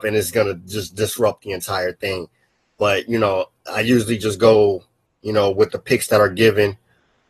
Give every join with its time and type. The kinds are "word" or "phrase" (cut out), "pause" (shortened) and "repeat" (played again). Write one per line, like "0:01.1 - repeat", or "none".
none